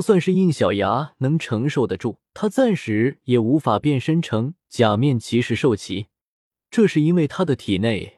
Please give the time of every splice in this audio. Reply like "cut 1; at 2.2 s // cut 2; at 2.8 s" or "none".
cut 1; at 2.3 s